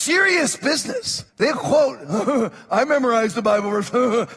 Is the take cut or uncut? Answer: cut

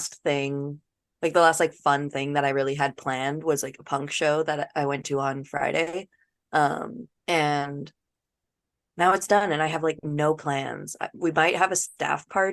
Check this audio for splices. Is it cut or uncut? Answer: cut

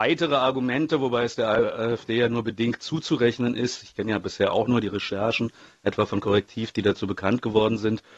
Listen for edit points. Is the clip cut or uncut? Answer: uncut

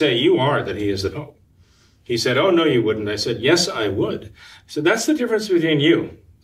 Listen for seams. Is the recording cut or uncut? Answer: uncut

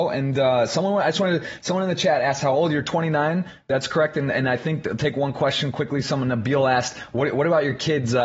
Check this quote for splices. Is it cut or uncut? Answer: uncut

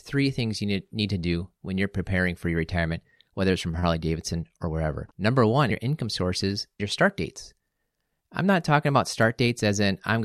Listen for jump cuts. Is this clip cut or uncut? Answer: cut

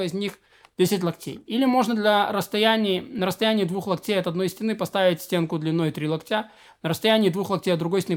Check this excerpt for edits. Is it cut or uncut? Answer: uncut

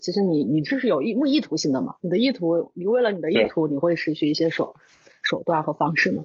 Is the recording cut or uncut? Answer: uncut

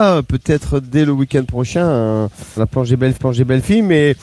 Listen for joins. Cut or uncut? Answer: cut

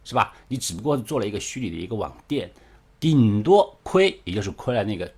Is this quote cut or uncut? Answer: cut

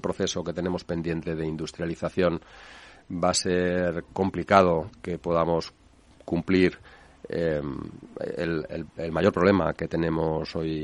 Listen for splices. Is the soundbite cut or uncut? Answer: uncut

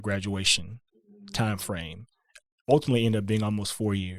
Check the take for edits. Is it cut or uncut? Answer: uncut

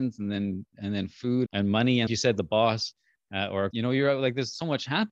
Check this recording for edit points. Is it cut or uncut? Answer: cut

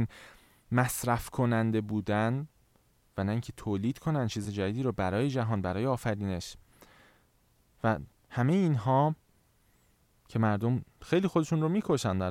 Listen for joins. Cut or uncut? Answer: uncut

